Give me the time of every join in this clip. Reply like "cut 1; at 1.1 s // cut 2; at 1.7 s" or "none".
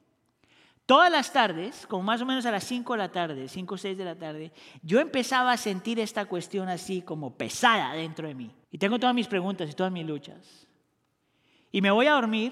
cut 1; at 8.6 s